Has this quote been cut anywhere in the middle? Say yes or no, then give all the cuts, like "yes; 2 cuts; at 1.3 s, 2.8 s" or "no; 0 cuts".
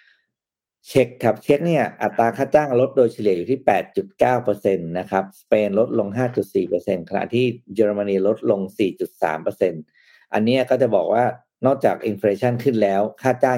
no; 0 cuts